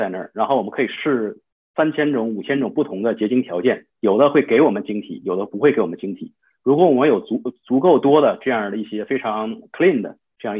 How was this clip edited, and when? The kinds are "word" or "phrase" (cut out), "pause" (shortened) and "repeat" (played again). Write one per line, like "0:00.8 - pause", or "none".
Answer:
0:03.9 - pause